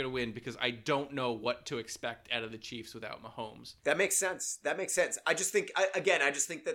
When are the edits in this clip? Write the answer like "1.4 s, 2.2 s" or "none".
3.8 s